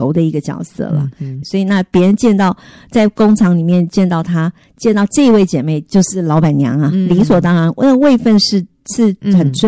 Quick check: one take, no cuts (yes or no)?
no